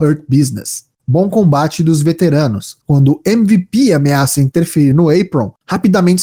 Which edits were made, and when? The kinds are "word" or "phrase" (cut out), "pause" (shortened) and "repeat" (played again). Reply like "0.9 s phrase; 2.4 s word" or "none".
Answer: 4.9 s phrase